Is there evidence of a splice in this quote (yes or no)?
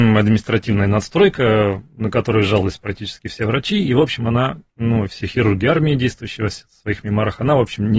no